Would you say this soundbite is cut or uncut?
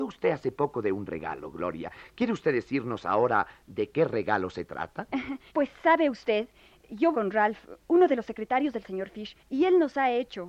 cut